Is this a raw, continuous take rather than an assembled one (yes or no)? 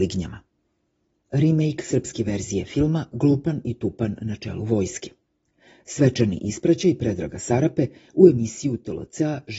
yes